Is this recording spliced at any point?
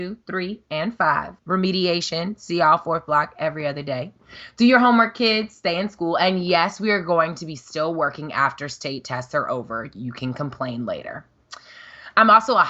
yes; 1 cut; at 1.4 s

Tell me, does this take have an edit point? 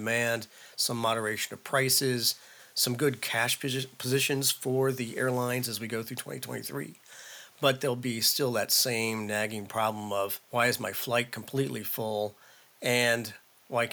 yes; 1 cut; at 10.4 s

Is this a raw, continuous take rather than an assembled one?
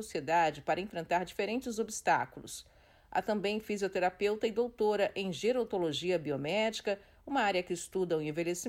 yes; 0 cuts

